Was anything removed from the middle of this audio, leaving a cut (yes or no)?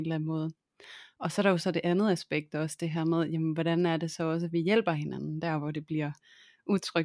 no